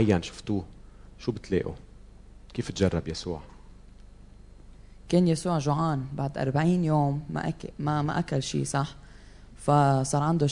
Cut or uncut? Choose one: uncut